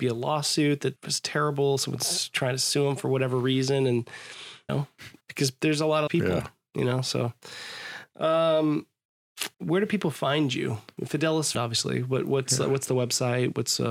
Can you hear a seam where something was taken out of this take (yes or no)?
yes